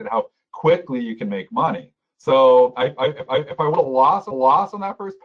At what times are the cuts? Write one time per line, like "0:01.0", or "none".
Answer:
0:03.3
0:04.3